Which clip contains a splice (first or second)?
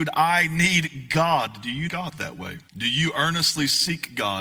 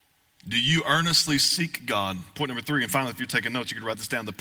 first